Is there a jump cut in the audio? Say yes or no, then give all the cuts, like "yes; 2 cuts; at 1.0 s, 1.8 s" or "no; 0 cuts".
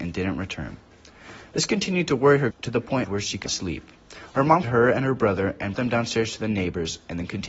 yes; 5 cuts; at 2.5 s, 3.0 s, 3.5 s, 4.6 s, 5.7 s